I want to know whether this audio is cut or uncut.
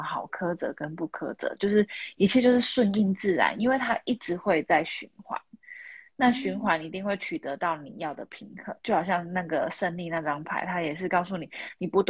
cut